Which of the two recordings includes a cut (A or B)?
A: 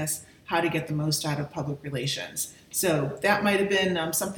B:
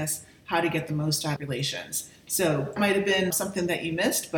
B